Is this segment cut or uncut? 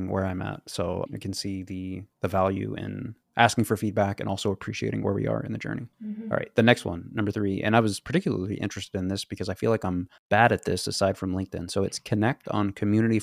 cut